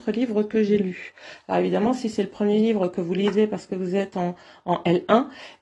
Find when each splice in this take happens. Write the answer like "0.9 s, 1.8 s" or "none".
none

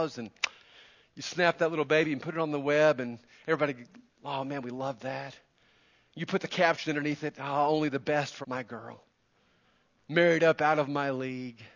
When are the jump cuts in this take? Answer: 8.4 s

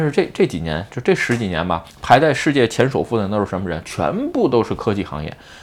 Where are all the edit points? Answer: 1.9 s

